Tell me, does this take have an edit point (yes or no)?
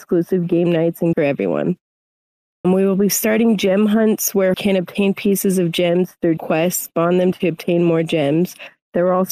yes